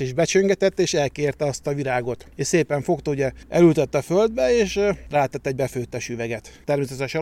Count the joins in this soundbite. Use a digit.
0